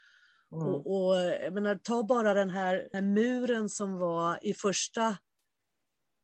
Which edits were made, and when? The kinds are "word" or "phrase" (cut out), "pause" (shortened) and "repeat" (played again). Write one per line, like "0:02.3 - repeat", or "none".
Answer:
0:02.9 - word